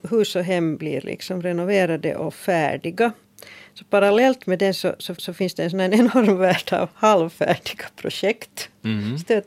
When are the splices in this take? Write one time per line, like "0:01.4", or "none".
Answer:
0:05.2